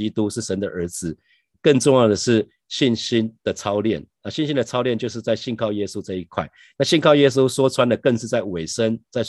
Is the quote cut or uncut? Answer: uncut